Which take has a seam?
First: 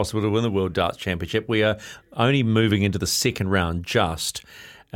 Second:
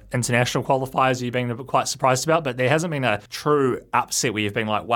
second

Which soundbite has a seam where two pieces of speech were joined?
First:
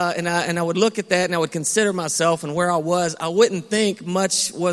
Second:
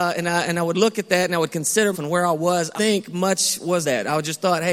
second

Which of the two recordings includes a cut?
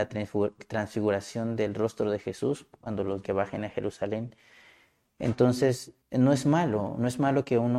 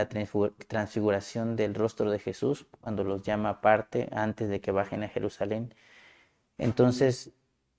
first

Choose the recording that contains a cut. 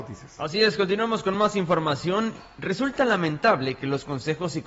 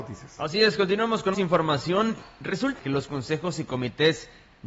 second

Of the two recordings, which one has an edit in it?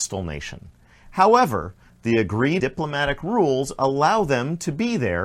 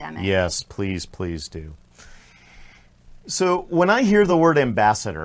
first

